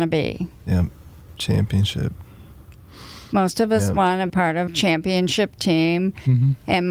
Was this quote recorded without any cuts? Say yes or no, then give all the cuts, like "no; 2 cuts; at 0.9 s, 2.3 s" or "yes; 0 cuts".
no; 2 cuts; at 4.3 s, 4.7 s